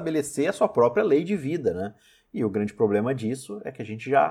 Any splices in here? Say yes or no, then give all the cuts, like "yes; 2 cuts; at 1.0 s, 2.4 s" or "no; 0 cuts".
no; 0 cuts